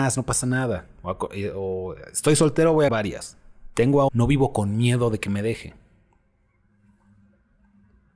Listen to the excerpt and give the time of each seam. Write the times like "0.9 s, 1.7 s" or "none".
2.9 s, 4.1 s